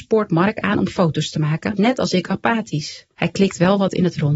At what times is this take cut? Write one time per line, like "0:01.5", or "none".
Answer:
0:01.8
0:03.1